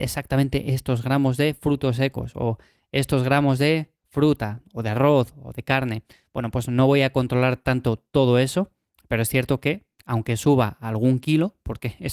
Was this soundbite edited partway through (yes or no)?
no